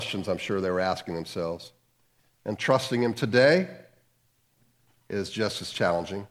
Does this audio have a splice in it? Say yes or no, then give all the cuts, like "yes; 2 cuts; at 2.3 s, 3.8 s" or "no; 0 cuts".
no; 0 cuts